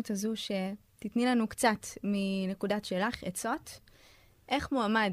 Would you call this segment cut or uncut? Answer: cut